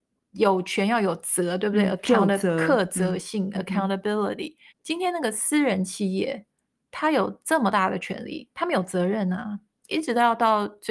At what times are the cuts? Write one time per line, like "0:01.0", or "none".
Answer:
0:04.7